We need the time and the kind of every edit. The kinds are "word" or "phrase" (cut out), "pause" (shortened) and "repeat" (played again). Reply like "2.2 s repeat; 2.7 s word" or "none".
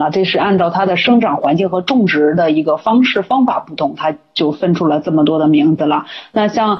none

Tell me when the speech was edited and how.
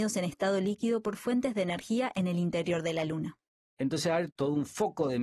none

